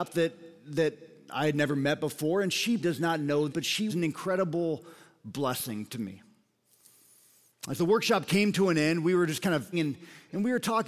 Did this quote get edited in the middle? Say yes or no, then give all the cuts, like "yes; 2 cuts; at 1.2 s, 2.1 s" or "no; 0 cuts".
yes; 4 cuts; at 2.8 s, 3.5 s, 3.9 s, 9.7 s